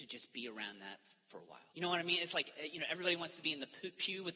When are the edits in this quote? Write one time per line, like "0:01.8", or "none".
0:01.7